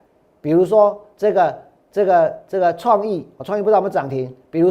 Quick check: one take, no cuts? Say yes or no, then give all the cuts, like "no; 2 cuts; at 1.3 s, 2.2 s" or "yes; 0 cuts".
yes; 0 cuts